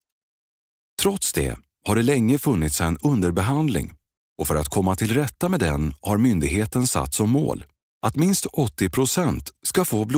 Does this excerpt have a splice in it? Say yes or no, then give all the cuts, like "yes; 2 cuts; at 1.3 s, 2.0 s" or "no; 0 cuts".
no; 0 cuts